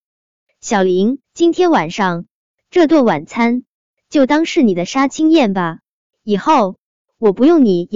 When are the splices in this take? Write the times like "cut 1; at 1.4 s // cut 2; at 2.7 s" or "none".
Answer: cut 1; at 1.2 s